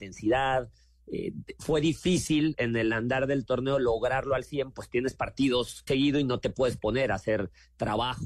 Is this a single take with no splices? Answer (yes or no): no